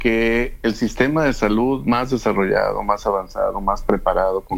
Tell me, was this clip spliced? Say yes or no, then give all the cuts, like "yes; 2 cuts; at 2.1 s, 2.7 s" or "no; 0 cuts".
no; 0 cuts